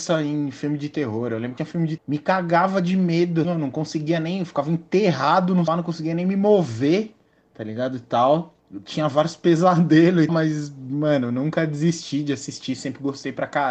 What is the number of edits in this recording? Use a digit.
7